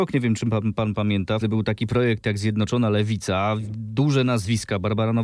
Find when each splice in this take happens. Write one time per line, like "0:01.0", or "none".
0:01.4